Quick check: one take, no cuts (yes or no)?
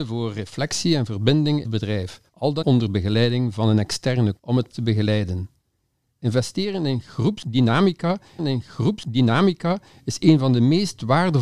no